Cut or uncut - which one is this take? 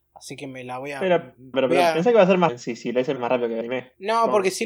cut